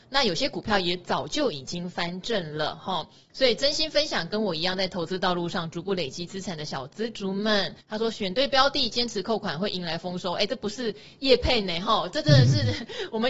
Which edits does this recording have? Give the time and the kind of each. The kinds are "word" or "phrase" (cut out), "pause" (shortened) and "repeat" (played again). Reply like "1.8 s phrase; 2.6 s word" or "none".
7.8 s pause